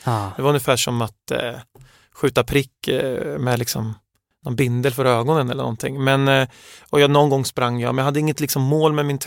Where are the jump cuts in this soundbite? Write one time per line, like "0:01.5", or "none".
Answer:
none